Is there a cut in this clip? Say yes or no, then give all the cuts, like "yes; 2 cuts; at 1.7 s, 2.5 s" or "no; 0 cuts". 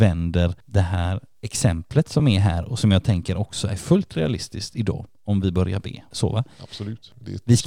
no; 0 cuts